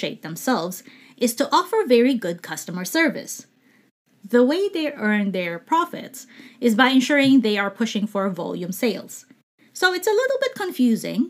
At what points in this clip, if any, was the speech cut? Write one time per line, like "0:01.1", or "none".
none